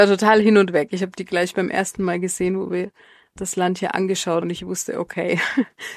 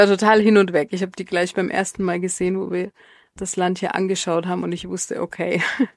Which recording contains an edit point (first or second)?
first